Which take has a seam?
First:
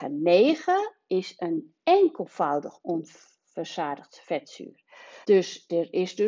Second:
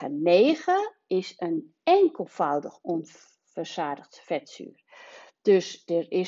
first; 1 cut; at 5.2 s

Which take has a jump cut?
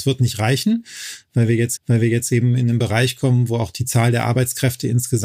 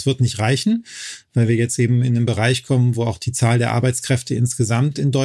first; 1 cut; at 1.8 s

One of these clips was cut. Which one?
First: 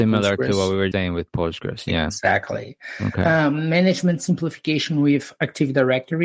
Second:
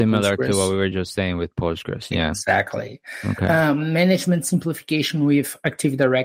first; 1 cut; at 0.9 s

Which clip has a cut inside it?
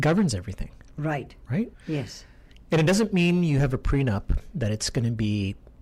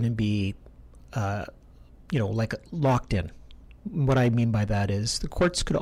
first; 1 cut; at 1.7 s

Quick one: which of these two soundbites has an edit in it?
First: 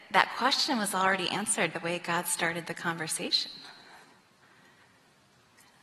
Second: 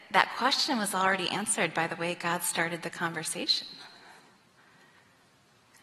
first; 1 cut; at 1.7 s

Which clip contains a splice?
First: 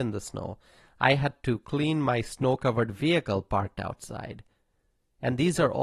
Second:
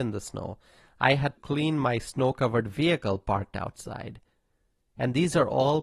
second; 1 cut; at 1.4 s

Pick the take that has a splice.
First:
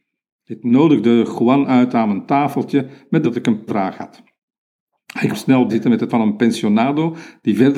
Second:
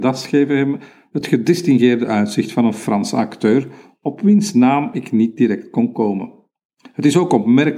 first; 5 cuts; at 3.2 s, 3.7 s, 5.3 s, 5.7 s, 6.1 s

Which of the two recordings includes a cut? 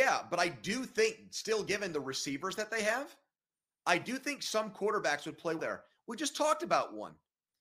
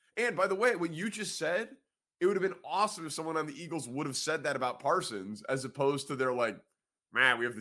first; 1 cut; at 5.6 s

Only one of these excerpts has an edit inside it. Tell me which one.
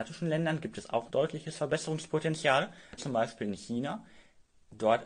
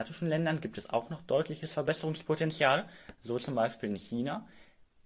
first; 2 cuts; at 1.1 s, 3.0 s

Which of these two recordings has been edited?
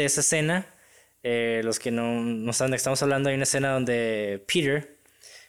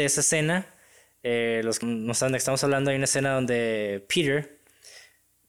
second; 1 cut; at 1.8 s

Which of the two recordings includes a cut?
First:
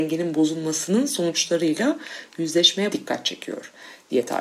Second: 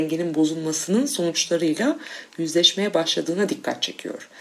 first; 1 cut; at 2.9 s

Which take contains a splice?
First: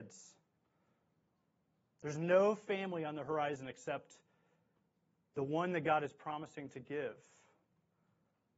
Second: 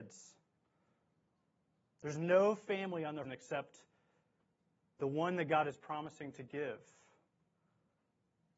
second; 1 cut; at 3.2 s

